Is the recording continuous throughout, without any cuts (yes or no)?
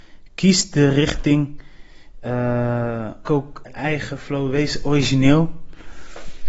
no